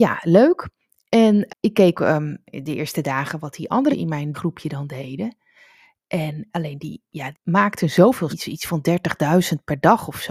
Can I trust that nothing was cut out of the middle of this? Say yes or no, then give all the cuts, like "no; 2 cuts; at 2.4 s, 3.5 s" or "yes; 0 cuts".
no; 8 cuts; at 1.5 s, 1.9 s, 2.5 s, 3.9 s, 4.3 s, 6.5 s, 7.3 s, 8.3 s